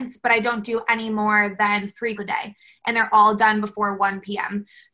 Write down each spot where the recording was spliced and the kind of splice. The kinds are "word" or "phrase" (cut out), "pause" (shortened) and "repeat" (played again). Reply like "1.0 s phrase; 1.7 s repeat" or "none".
2.2 s word